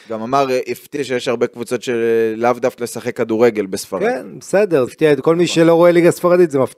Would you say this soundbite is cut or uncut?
cut